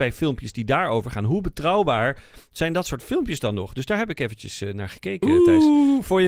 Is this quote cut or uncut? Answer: uncut